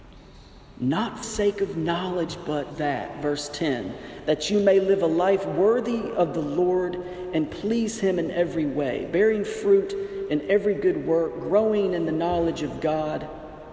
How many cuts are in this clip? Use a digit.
2